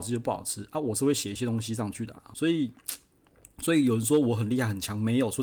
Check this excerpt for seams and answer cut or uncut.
cut